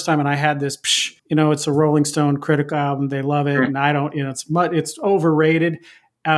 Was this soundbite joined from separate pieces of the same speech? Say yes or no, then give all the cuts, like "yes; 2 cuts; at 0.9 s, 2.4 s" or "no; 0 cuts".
yes; 1 cut; at 1.2 s